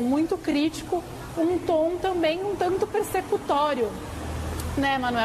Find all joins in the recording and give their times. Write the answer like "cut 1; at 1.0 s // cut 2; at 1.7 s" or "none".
none